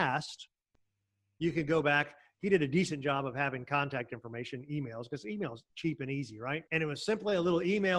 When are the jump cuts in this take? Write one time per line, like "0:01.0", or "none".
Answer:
0:05.7
0:06.7